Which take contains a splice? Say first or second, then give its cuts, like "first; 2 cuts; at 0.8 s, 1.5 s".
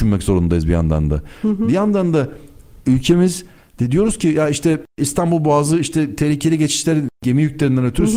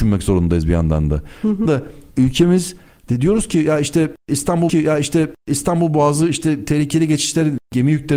second; 3 cuts; at 1.7 s, 2.1 s, 4.7 s